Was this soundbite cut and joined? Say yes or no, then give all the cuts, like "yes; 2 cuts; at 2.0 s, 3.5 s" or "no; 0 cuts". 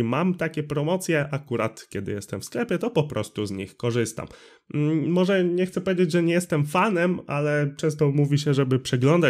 no; 0 cuts